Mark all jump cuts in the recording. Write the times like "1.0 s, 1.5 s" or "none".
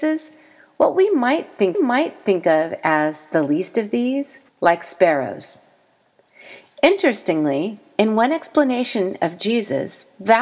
1.7 s, 4.5 s